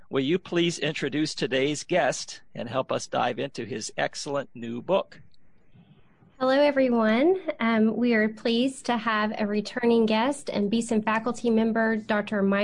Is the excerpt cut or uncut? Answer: uncut